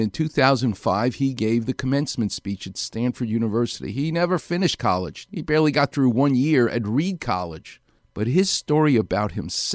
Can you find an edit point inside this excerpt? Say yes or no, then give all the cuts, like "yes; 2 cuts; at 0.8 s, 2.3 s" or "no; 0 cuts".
no; 0 cuts